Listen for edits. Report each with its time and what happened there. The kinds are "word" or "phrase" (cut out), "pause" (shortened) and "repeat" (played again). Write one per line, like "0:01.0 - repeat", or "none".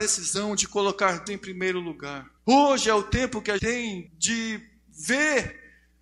0:01.3 - word
0:02.4 - pause
0:03.6 - word
0:04.1 - word